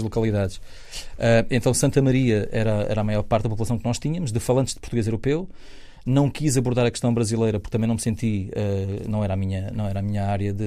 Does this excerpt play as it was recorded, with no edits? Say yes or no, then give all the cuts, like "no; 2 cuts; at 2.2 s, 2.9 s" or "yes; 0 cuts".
yes; 0 cuts